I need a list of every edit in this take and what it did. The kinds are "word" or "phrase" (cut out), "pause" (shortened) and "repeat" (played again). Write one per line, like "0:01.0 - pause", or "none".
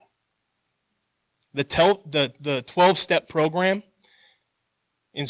none